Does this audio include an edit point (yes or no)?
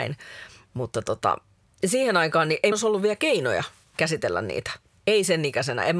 yes